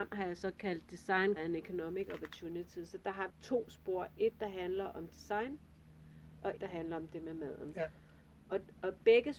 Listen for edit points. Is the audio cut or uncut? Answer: cut